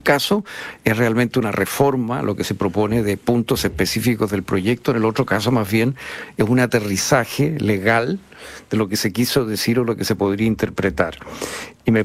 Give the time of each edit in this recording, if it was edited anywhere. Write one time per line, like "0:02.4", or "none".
none